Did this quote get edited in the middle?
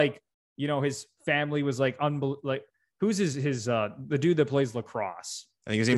no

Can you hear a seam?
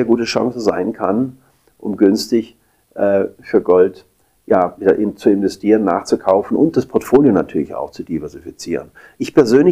no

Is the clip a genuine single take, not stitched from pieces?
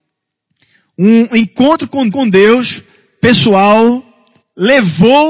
no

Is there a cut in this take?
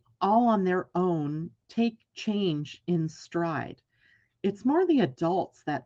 no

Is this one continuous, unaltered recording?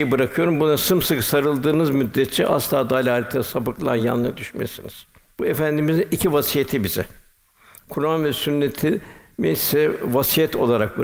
yes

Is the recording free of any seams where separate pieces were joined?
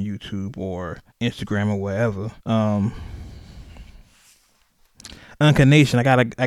no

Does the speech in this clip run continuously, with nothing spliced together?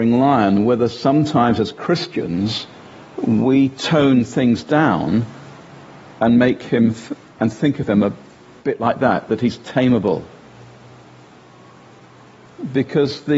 yes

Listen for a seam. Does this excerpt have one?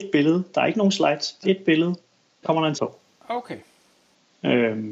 yes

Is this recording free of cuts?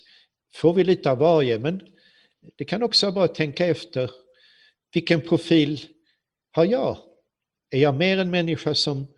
yes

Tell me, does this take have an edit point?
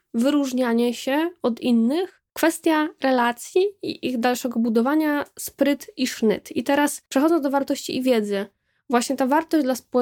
yes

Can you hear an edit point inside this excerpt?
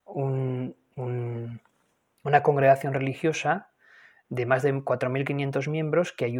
no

